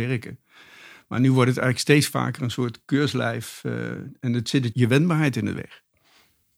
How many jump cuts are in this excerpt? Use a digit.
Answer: 1